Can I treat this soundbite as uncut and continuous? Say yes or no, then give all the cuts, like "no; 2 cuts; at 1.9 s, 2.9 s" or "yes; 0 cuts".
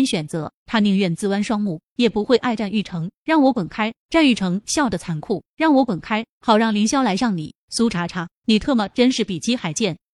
yes; 0 cuts